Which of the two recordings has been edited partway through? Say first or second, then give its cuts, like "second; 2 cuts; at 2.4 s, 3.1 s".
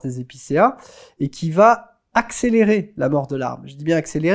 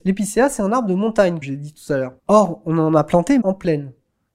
second; 3 cuts; at 1.4 s, 2.2 s, 3.4 s